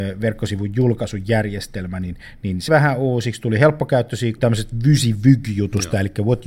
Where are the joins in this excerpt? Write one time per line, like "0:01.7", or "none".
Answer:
0:02.7
0:04.4